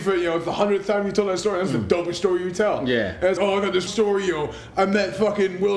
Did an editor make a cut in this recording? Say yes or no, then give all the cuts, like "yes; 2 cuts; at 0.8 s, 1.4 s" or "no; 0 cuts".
yes; 2 cuts; at 3.4 s, 3.9 s